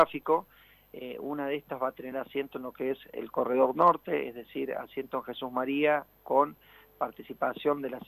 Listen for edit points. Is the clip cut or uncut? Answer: uncut